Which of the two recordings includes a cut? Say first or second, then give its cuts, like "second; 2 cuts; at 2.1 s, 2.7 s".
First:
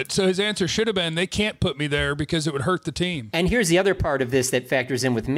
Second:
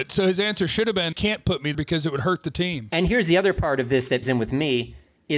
second; 3 cuts; at 1.1 s, 1.7 s, 4.2 s